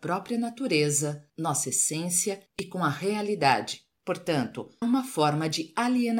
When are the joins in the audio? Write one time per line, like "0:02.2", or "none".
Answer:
0:04.8